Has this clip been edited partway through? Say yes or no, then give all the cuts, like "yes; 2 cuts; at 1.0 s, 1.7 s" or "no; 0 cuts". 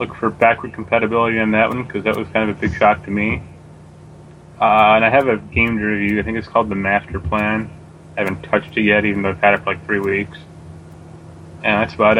no; 0 cuts